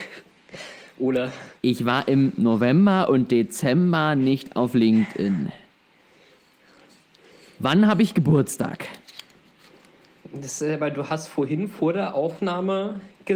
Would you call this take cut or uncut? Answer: uncut